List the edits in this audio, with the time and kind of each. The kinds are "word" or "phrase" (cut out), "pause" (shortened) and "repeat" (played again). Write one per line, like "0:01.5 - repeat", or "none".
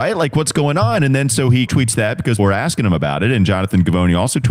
0:01.7 - word
0:02.4 - word